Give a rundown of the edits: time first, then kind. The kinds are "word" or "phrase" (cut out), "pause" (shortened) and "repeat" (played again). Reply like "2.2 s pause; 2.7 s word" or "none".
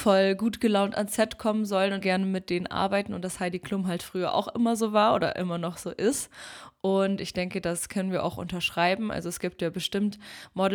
2.0 s phrase